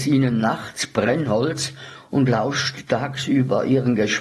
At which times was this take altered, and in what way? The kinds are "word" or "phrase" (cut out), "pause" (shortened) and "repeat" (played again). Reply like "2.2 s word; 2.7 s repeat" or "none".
none